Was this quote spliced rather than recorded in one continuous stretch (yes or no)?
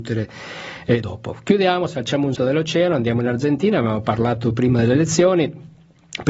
yes